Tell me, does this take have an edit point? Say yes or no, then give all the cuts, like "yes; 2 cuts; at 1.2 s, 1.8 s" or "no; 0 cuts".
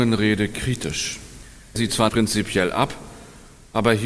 yes; 2 cuts; at 1.8 s, 2.1 s